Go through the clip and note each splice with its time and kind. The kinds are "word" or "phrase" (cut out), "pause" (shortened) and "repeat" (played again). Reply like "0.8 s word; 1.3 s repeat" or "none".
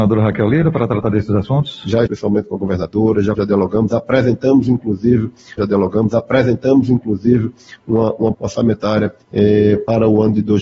2.1 s word; 3.3 s word; 5.6 s repeat; 8.3 s word; 9.2 s pause